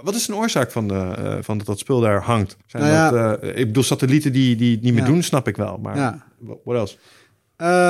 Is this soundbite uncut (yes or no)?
no